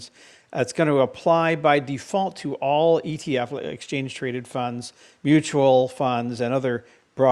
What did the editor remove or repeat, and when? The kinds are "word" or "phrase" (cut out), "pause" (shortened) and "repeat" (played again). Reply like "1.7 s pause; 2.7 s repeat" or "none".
none